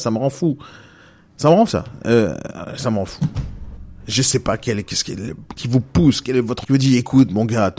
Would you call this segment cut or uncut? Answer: cut